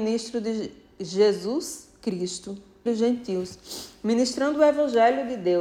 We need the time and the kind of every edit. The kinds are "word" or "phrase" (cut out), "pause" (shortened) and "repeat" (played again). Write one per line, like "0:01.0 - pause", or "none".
0:02.9 - word